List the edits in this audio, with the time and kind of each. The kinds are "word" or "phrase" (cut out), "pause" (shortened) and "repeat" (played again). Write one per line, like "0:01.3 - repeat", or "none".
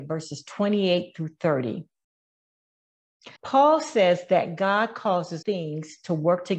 0:03.4 - pause
0:05.4 - word